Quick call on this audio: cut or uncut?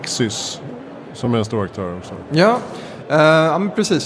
uncut